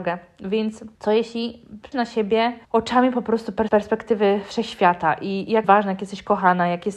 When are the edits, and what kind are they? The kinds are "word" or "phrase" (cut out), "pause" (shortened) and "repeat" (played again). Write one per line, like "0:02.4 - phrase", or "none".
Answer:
0:00.9 - pause
0:01.9 - word
0:02.6 - pause
0:03.7 - word
0:05.6 - word